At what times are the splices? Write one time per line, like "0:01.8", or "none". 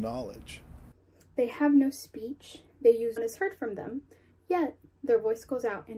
0:03.2

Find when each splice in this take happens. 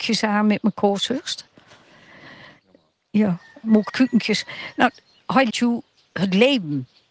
0:03.9
0:05.5

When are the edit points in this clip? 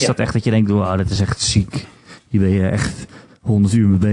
none

